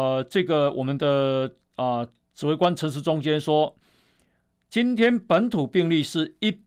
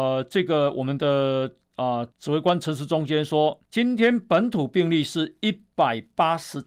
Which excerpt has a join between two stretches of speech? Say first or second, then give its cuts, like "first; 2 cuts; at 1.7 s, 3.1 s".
second; 2 cuts; at 2.1 s, 3.7 s